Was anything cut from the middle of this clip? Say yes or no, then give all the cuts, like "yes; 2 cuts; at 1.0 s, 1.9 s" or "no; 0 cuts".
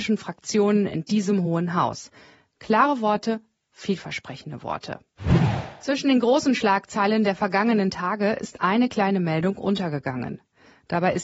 no; 0 cuts